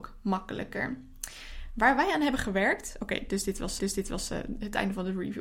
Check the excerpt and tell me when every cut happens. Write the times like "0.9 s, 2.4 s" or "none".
3.8 s